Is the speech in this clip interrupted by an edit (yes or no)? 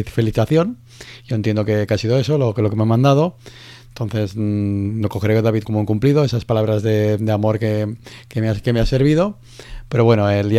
yes